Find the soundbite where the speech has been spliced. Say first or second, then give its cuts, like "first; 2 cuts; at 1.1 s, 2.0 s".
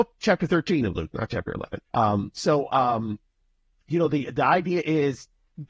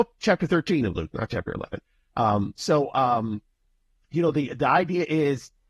first; 1 cut; at 1.9 s